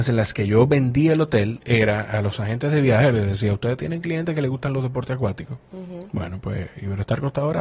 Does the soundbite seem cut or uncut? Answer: uncut